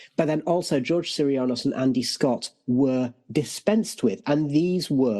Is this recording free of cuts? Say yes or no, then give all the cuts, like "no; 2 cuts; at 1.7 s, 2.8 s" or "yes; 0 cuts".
yes; 0 cuts